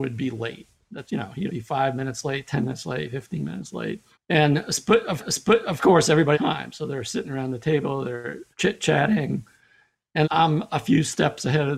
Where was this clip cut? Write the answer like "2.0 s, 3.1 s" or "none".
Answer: 1.1 s, 1.5 s, 4.1 s, 5.2 s, 6.3 s, 8.5 s, 10.2 s